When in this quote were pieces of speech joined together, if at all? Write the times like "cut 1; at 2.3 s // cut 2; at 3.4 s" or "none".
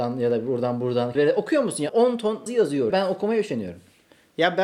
cut 1; at 1.1 s // cut 2; at 1.9 s // cut 3; at 2.5 s // cut 4; at 2.9 s